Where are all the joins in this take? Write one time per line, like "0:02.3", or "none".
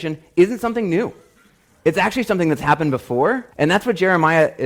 0:03.5